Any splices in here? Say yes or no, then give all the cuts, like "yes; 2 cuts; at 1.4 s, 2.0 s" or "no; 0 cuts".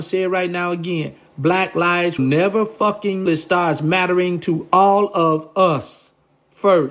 yes; 2 cuts; at 2.2 s, 3.3 s